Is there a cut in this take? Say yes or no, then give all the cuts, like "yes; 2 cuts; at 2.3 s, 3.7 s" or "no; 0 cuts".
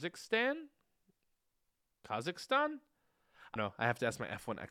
yes; 1 cut; at 3.6 s